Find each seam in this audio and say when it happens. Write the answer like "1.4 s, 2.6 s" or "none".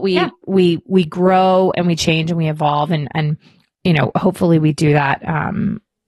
none